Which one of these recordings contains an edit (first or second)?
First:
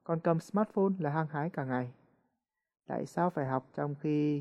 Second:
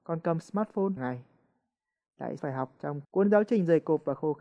second